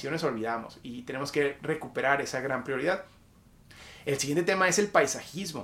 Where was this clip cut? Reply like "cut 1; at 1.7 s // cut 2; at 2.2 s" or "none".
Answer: none